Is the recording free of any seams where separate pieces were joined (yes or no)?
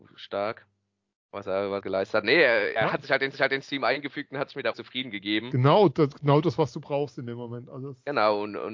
no